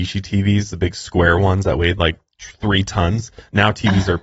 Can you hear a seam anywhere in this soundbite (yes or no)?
no